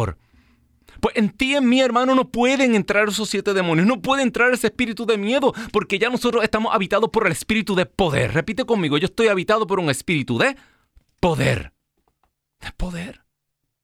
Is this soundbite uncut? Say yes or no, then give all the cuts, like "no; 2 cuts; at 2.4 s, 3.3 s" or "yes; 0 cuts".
yes; 0 cuts